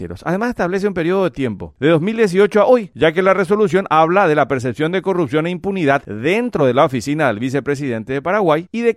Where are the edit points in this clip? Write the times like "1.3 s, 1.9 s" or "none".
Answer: none

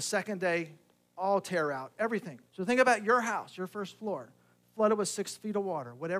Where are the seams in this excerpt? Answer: 2.5 s

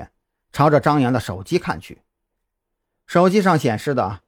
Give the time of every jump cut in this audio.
none

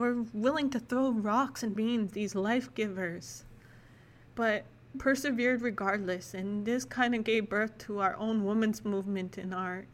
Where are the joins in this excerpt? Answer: 1.8 s, 4.9 s

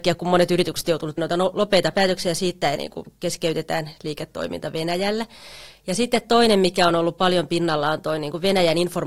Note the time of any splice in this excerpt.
1.2 s, 1.9 s, 2.8 s

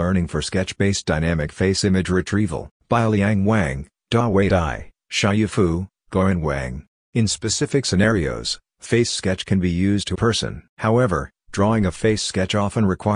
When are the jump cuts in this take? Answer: 2.8 s, 6.9 s, 10.1 s, 10.7 s

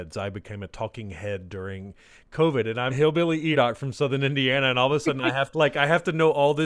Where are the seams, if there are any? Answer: 2.9 s, 3.5 s, 5.5 s

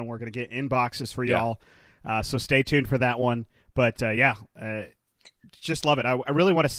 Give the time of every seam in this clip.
none

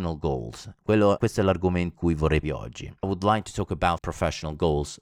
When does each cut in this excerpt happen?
1.2 s, 1.9 s, 2.4 s, 3.0 s, 4.0 s

